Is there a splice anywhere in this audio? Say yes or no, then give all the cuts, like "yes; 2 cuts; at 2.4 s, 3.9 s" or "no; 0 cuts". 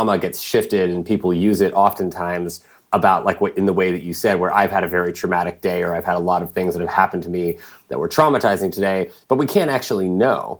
no; 0 cuts